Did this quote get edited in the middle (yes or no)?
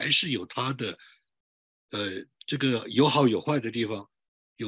no